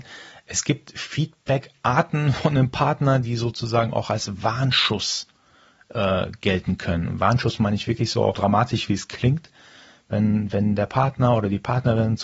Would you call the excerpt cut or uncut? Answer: cut